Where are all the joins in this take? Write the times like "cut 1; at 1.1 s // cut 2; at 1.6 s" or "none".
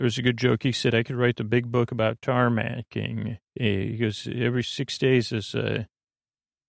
cut 1; at 3.4 s // cut 2; at 4.6 s // cut 3; at 5.3 s